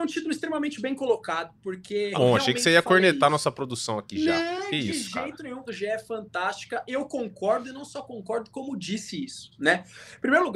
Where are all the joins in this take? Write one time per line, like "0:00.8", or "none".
0:02.1
0:05.7